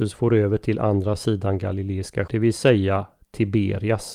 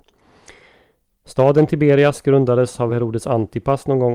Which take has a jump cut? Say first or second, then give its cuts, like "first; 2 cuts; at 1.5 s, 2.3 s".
first; 1 cut; at 2.3 s